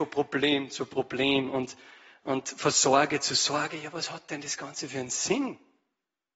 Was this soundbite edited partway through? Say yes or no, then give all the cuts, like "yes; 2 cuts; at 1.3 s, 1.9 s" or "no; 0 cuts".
no; 0 cuts